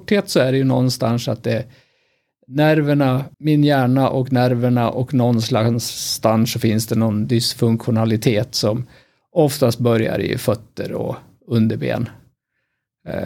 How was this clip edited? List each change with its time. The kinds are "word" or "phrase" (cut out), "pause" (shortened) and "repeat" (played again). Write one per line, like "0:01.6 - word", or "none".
0:03.3 - pause